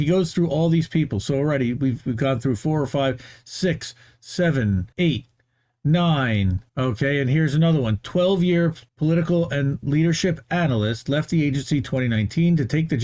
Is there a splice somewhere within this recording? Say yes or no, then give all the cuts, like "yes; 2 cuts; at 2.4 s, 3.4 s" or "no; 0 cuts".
yes; 3 cuts; at 4.9 s, 6.7 s, 8.9 s